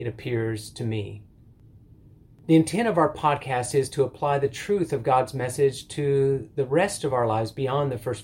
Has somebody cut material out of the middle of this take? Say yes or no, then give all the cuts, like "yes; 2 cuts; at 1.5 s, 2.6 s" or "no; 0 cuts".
no; 0 cuts